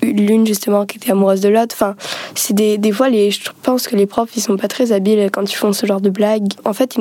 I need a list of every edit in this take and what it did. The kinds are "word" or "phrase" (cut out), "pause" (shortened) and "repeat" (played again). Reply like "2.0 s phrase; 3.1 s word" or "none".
none